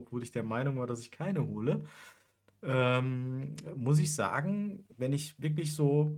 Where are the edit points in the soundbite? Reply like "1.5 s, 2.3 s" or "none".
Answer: 4.9 s